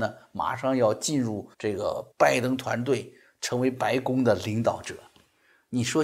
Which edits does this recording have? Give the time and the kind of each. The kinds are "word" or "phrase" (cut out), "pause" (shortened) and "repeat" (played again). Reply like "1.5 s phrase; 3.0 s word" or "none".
1.5 s pause; 2.1 s pause